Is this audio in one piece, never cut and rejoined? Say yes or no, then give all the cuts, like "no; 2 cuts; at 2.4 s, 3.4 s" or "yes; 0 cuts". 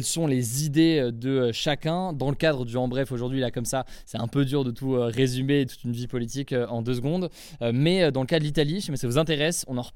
no; 1 cut; at 5.7 s